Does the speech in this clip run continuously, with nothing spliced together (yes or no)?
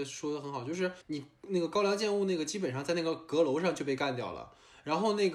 no